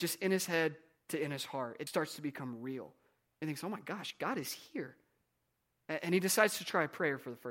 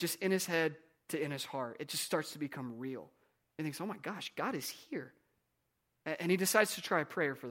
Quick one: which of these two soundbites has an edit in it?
first; 1 cut; at 1.9 s

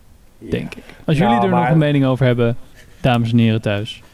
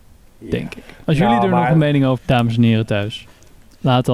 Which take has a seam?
second; 1 cut; at 2.2 s

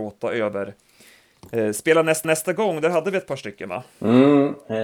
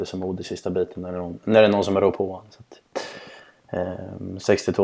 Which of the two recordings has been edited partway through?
first; 1 cut; at 2.2 s

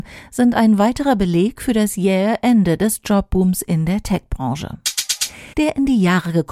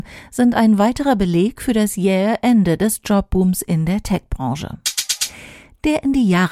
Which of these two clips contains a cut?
first; 1 cut; at 5.5 s

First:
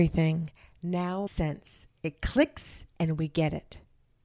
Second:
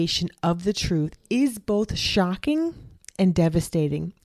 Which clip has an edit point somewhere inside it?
first; 2 cuts; at 1.3 s, 2.9 s

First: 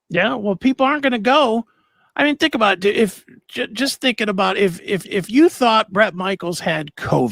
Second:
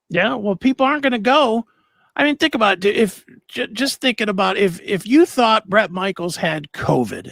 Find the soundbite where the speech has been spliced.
first; 1 cut; at 5.0 s

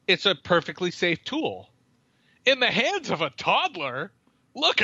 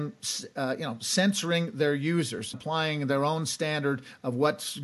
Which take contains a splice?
second; 1 cut; at 2.5 s

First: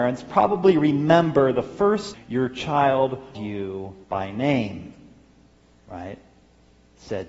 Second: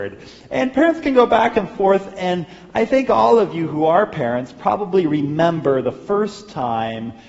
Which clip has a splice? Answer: first; 3 cuts; at 2.1 s, 3.3 s, 4.0 s

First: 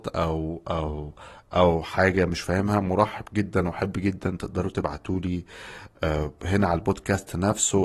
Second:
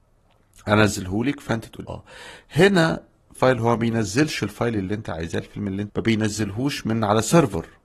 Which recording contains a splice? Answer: second; 3 cuts; at 1.9 s, 3.4 s, 5.9 s

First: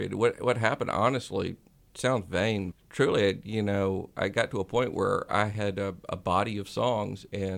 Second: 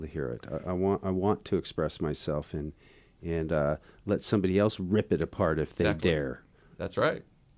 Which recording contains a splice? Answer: first; 1 cut; at 2.7 s

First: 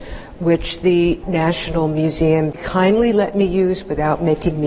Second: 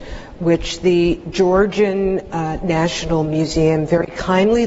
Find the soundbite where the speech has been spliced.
first; 2 cuts; at 1.2 s, 2.5 s

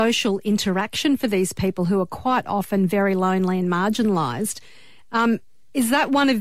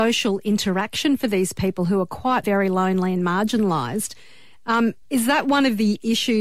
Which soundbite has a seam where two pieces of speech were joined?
second; 2 cuts; at 2.4 s, 5.0 s

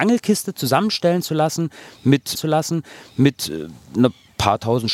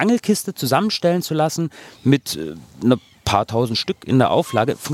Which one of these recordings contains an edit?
first; 1 cut; at 2.4 s

